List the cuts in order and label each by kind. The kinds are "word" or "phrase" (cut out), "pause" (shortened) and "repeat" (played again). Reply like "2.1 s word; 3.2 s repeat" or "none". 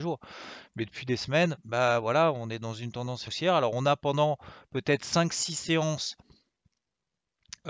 3.3 s word